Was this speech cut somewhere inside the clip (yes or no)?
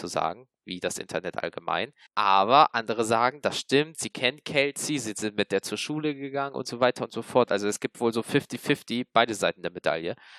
yes